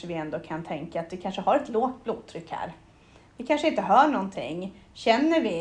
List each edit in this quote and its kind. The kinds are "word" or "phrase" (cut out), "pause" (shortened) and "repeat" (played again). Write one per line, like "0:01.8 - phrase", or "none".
none